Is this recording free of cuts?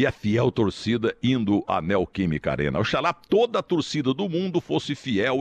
yes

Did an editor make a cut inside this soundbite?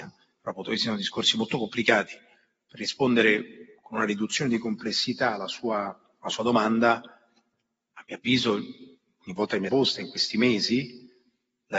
yes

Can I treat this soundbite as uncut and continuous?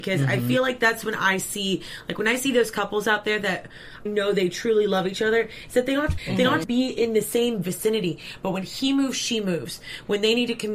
no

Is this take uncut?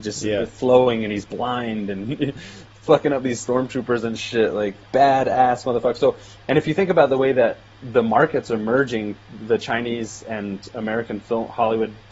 yes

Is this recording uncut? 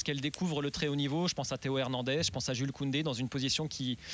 yes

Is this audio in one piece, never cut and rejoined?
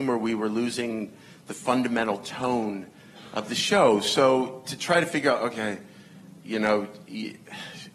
yes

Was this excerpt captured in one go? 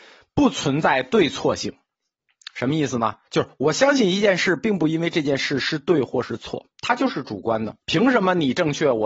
no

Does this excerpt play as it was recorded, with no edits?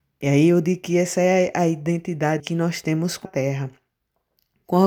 no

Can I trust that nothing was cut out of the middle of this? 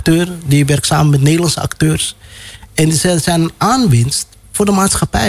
yes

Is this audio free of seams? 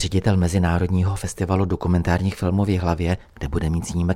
yes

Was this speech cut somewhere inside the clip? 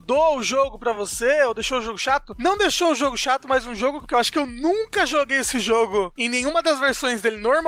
no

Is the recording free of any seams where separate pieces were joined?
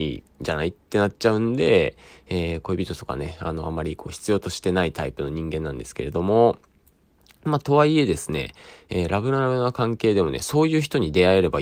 yes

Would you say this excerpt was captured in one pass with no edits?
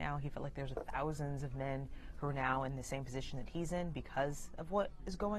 yes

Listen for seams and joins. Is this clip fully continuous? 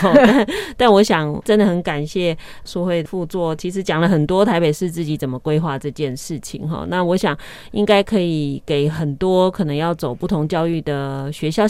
yes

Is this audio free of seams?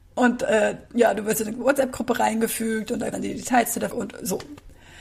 no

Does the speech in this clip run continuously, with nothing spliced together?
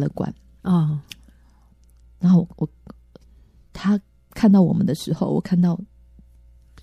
yes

